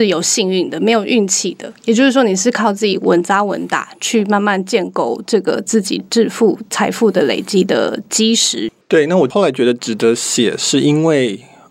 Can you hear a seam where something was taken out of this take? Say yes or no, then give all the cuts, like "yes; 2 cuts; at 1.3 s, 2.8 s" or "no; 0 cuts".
yes; 1 cut; at 8.8 s